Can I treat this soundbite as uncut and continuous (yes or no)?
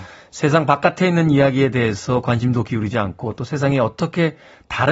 yes